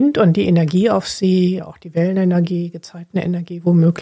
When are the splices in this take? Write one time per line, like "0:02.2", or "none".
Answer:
0:01.6